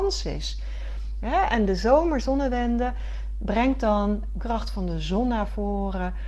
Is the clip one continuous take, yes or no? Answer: no